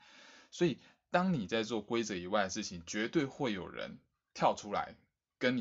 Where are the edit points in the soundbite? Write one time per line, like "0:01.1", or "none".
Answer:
none